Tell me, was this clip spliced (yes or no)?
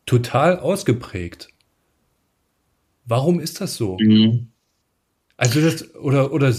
no